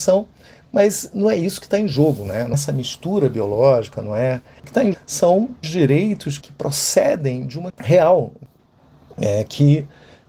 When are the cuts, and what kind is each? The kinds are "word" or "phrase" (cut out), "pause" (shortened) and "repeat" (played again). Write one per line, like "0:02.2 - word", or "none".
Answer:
0:02.5 - word
0:04.9 - word
0:05.6 - word
0:06.4 - word
0:07.7 - word